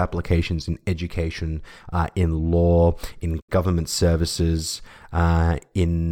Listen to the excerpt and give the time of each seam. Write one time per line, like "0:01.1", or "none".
none